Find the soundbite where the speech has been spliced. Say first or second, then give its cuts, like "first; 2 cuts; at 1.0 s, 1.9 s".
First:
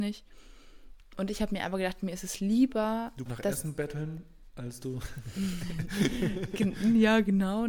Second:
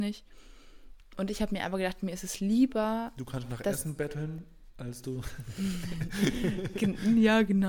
first; 1 cut; at 3.3 s